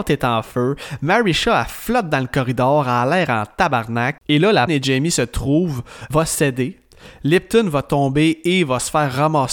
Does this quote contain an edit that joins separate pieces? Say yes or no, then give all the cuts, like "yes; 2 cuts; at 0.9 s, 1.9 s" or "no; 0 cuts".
yes; 3 cuts; at 4.2 s, 4.7 s, 6.1 s